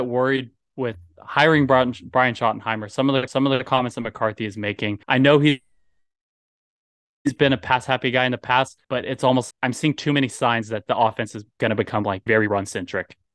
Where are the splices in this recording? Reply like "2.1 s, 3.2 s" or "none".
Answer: 3.3 s, 5.0 s, 8.8 s, 9.5 s, 11.5 s, 12.3 s